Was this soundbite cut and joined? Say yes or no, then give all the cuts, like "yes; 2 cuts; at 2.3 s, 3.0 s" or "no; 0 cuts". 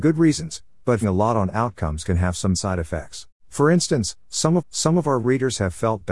yes; 4 cuts; at 1.0 s, 2.5 s, 3.4 s, 4.6 s